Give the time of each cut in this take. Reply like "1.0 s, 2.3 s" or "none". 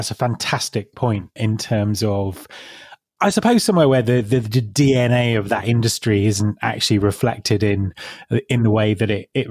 none